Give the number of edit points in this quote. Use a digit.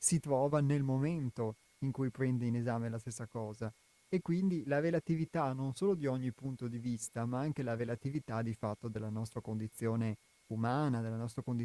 0